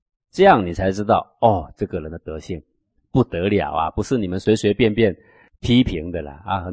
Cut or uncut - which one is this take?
uncut